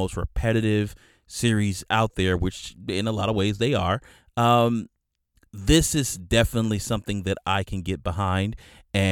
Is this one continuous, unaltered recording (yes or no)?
yes